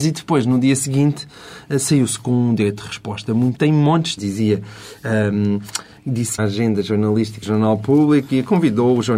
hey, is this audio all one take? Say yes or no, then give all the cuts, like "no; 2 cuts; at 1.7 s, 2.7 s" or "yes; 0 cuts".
no; 4 cuts; at 3.5 s, 4.2 s, 6.4 s, 7.4 s